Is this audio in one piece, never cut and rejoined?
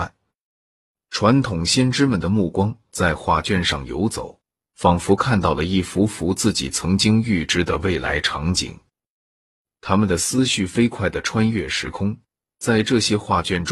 yes; 0 cuts

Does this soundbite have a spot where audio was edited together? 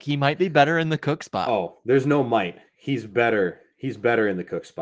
no; 0 cuts

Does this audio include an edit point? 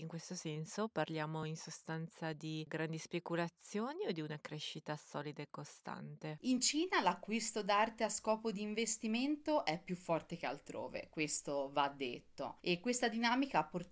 no; 0 cuts

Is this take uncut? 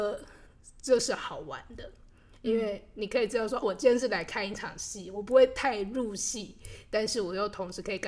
no; 1 cut; at 3.6 s

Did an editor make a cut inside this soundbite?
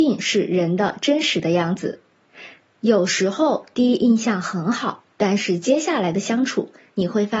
yes; 1 cut; at 5.1 s

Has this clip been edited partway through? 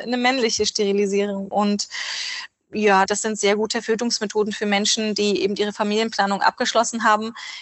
no; 0 cuts

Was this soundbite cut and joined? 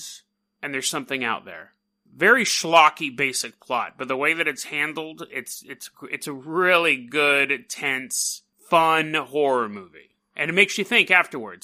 no; 0 cuts

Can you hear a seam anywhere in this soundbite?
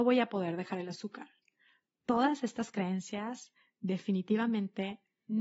no; 0 cuts

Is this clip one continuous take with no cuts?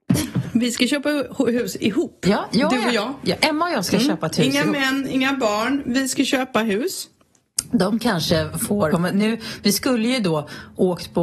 no; 1 cut; at 8.9 s

